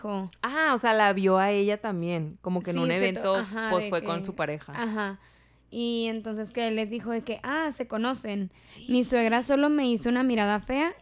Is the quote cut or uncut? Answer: uncut